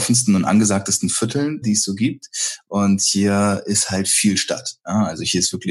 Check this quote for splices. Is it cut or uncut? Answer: cut